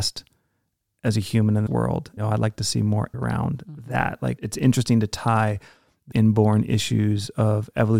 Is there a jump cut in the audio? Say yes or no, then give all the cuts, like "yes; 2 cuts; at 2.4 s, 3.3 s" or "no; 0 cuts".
yes; 5 cuts; at 1.7 s, 2.2 s, 3.1 s, 4.4 s, 6.1 s